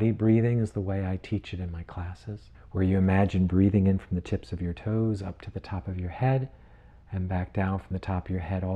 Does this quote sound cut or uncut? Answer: cut